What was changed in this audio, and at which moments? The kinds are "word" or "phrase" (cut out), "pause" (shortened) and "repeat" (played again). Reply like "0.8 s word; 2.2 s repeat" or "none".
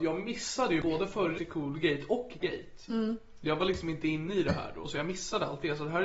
1.4 s word; 2.4 s word

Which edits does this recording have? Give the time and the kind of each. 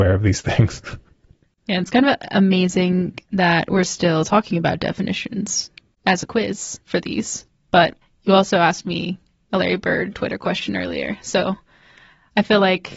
3.2 s pause; 6.8 s pause; 8.0 s pause

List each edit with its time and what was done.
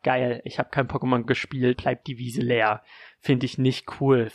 1.2 s word; 1.7 s word

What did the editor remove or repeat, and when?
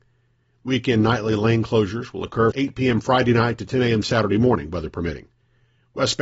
2.5 s word

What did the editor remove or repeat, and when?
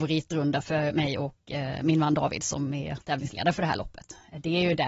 none

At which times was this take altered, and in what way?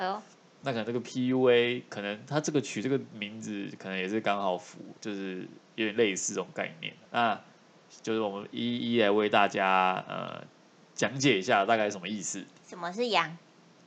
5.0 s pause; 7.0 s pause

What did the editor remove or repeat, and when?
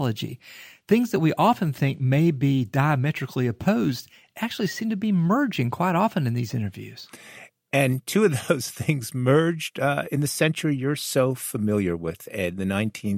none

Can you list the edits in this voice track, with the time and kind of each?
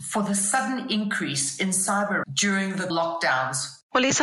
2.2 s word; 2.9 s word

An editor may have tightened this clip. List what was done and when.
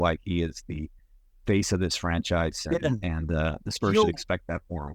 none

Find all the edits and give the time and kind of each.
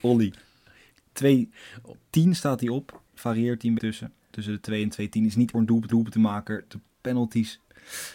3.1 s pause; 3.8 s word; 5.5 s phrase; 5.9 s repeat

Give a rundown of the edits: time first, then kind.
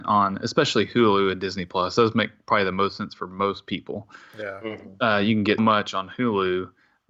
5.6 s word

